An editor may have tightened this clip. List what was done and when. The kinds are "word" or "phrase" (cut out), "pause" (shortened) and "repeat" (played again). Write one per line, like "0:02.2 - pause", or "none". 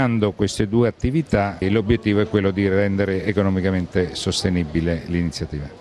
none